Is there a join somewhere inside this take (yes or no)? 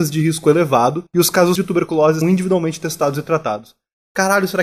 yes